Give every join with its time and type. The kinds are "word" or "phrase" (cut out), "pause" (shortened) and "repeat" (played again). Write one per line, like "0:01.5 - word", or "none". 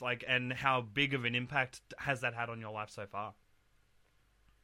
none